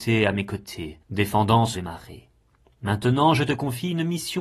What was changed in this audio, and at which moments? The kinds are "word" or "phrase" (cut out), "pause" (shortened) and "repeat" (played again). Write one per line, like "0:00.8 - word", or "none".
0:01.0 - pause
0:01.7 - phrase